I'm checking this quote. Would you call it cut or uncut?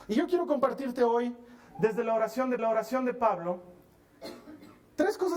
cut